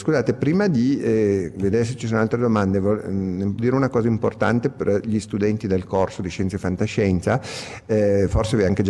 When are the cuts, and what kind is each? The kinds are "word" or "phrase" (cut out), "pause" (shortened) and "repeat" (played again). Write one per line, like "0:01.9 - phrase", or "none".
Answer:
0:03.6 - word